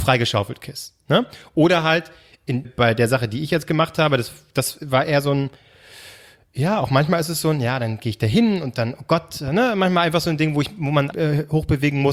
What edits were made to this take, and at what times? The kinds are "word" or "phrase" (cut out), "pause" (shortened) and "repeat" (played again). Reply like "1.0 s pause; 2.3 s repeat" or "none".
2.6 s word; 11.1 s word